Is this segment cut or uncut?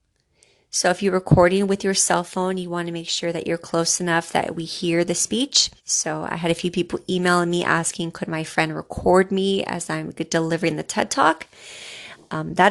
cut